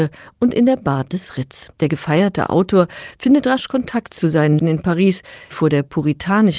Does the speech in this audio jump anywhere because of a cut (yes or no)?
yes